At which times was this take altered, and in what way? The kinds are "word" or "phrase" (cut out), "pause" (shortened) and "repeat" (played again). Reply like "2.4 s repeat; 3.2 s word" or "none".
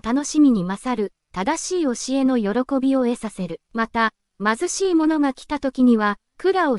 3.6 s pause